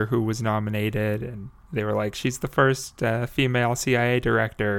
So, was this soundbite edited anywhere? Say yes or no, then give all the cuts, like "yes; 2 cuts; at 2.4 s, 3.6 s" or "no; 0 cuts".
no; 0 cuts